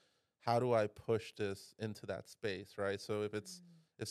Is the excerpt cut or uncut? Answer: uncut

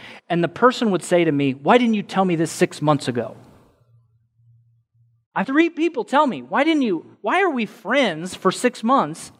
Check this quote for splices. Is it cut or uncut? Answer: cut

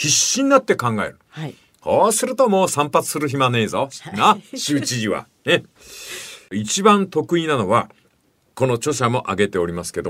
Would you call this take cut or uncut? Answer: uncut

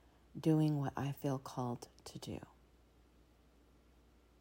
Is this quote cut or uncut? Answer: uncut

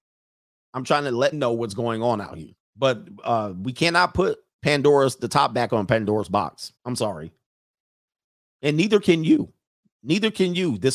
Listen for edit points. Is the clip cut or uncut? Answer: cut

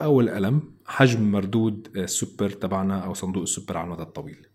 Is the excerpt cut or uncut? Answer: uncut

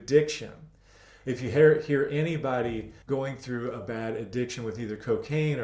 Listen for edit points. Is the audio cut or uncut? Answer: cut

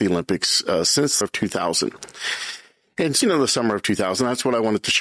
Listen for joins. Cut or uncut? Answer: cut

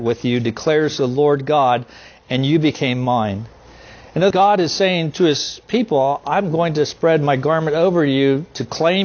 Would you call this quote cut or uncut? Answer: cut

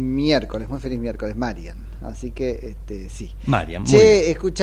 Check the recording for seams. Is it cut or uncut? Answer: uncut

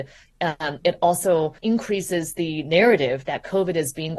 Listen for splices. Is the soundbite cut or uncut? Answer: cut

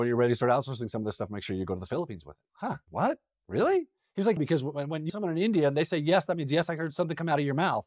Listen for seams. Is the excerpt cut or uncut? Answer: cut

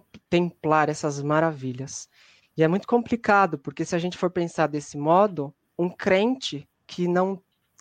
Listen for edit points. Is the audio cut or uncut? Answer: uncut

